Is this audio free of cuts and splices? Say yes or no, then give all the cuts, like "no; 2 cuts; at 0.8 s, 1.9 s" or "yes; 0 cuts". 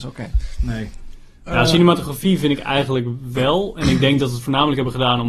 yes; 0 cuts